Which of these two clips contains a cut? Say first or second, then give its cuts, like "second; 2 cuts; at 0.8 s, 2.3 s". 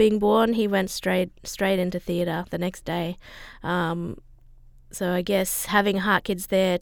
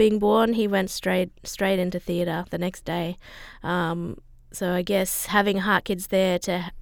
second; 1 cut; at 4.3 s